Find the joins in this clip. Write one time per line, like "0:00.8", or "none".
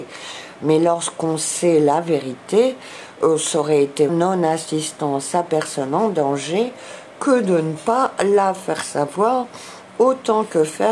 0:04.1
0:09.9